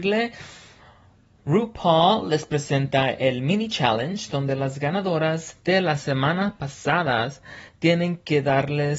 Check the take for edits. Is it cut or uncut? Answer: uncut